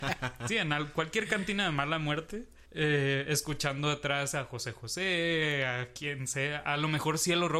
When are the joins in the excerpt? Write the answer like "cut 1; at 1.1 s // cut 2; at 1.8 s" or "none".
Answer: cut 1; at 2.7 s